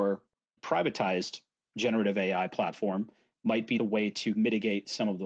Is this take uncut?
yes; 0 cuts

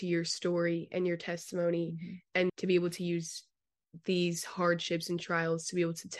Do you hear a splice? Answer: yes; 1 cut; at 2.5 s

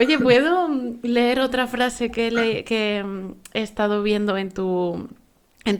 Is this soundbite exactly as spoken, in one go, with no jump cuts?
yes; 0 cuts

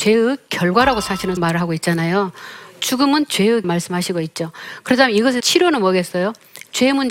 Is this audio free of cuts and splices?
no; 3 cuts; at 1.4 s, 3.6 s, 5.4 s

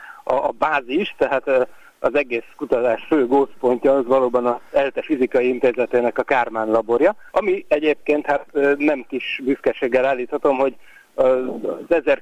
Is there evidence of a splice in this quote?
yes; 1 cut; at 7.3 s

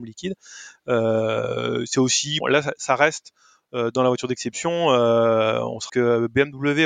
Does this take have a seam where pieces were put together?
yes; 2 cuts; at 2.4 s, 5.9 s

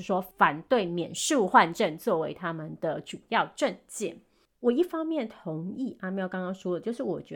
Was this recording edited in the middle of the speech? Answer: no; 0 cuts

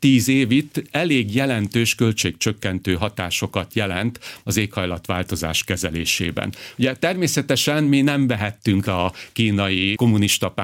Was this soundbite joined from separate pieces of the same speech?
yes; 1 cut; at 8.8 s

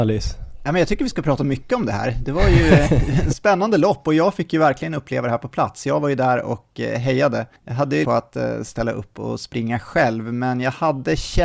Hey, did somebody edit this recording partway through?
yes; 3 cuts; at 3.3 s, 7.6 s, 8.0 s

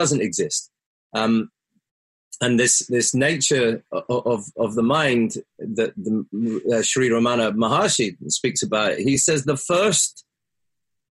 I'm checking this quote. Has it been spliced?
no; 0 cuts

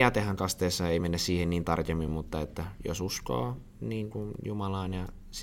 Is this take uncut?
yes; 0 cuts

